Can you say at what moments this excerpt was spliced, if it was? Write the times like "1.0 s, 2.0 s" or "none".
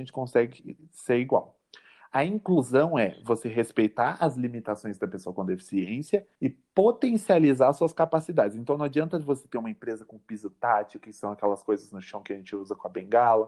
6.3 s